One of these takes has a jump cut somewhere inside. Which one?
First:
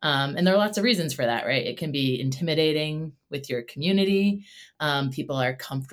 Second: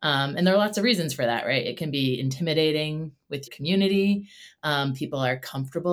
second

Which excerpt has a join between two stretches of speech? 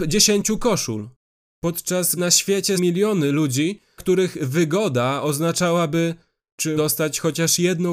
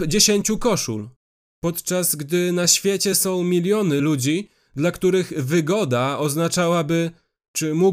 first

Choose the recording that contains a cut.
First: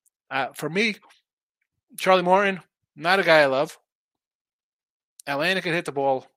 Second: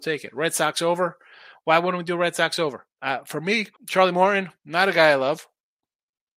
second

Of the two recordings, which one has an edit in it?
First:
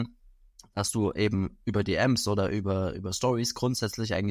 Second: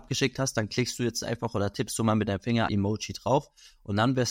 second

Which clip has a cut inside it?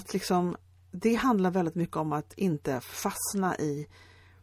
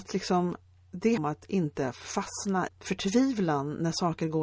second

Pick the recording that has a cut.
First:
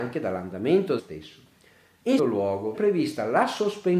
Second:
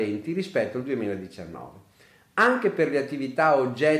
first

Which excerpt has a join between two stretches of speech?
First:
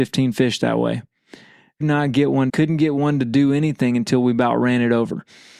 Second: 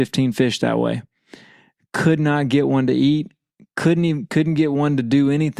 first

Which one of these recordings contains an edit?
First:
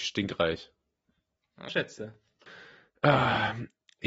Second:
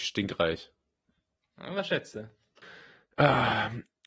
first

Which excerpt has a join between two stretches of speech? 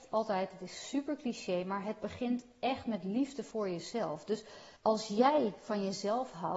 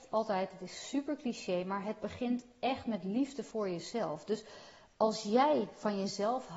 first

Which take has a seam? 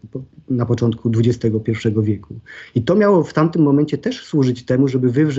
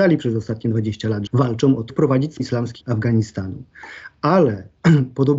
second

